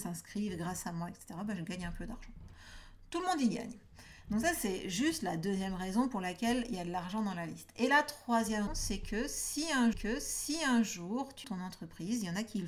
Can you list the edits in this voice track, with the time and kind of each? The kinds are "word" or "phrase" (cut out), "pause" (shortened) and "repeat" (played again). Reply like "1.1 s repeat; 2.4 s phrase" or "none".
8.7 s word; 9.9 s repeat; 11.4 s phrase